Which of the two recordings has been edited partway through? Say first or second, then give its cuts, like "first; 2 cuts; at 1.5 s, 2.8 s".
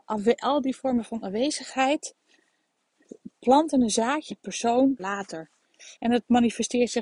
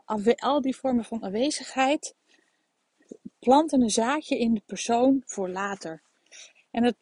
first; 3 cuts; at 4.3 s, 5.0 s, 6.0 s